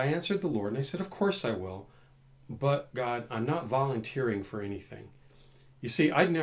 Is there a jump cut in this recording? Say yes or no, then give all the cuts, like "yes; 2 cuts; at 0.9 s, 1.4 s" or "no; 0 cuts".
no; 0 cuts